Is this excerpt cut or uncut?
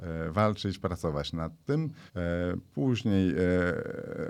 cut